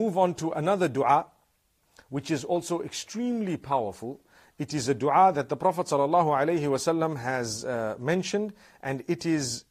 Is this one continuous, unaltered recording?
yes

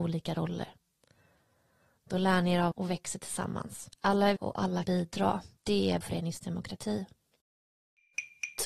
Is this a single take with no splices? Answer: no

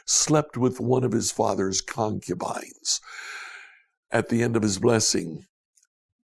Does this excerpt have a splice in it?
no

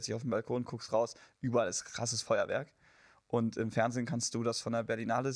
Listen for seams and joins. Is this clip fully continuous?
yes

